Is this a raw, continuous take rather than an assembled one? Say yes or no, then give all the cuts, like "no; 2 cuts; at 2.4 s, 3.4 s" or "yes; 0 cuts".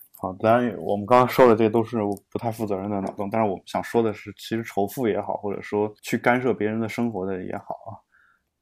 no; 1 cut; at 6.0 s